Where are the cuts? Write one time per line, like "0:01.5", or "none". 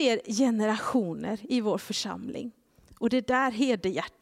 none